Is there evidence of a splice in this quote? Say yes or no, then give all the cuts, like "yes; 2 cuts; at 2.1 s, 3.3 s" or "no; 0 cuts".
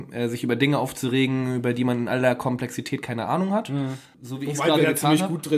no; 0 cuts